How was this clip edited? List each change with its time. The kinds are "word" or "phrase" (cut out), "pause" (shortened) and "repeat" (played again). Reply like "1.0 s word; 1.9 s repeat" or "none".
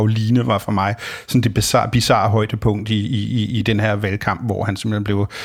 none